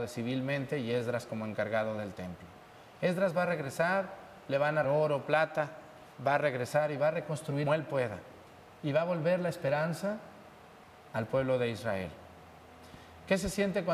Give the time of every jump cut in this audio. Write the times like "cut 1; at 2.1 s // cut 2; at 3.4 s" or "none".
cut 1; at 4.8 s // cut 2; at 6.1 s // cut 3; at 7.7 s